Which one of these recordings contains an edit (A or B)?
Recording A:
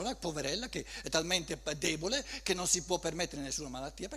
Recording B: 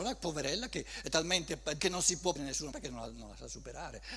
B